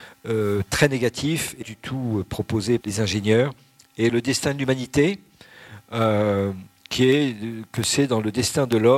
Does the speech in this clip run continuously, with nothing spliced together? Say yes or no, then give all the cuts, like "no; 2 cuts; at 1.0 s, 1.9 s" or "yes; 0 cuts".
no; 3 cuts; at 1.6 s, 2.8 s, 4.1 s